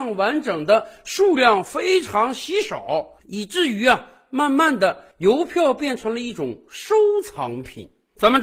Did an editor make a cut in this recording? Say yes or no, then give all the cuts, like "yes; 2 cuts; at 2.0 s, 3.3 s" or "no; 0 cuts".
yes; 1 cut; at 3.2 s